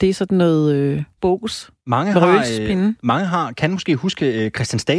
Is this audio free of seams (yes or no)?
no